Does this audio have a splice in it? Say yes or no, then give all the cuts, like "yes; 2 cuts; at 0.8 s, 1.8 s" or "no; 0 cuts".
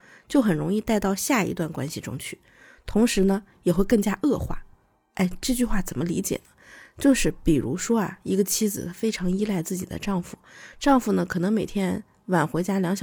no; 0 cuts